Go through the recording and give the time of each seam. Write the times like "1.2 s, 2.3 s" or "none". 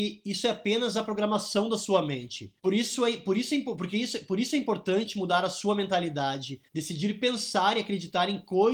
2.6 s, 6.7 s